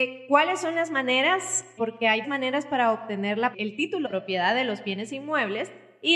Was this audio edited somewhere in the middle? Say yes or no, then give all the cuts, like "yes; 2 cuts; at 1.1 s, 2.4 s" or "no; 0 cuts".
yes; 4 cuts; at 1.8 s, 2.2 s, 3.5 s, 4.1 s